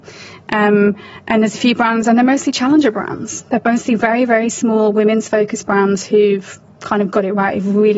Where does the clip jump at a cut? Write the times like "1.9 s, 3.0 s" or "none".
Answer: none

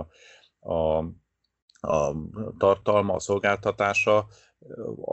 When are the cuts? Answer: none

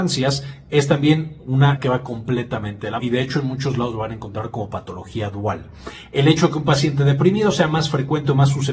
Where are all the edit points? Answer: 1.8 s, 3.0 s

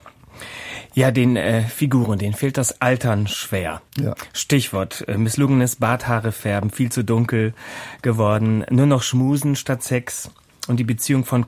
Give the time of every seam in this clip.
3.9 s

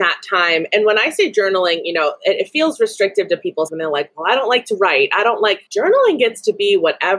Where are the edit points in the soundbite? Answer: 3.7 s, 5.7 s

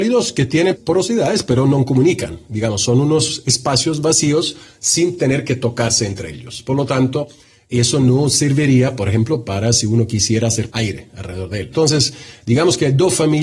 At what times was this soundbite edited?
10.7 s

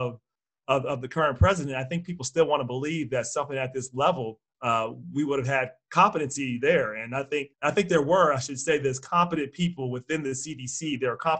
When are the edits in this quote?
4.5 s, 7.5 s

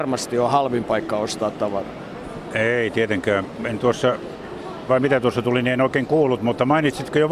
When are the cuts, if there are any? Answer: 4.9 s

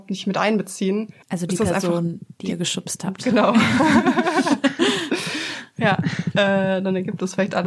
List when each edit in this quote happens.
1.2 s

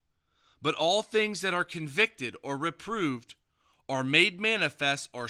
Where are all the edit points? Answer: none

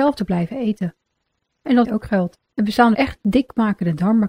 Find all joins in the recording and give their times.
1.8 s, 2.5 s, 2.9 s

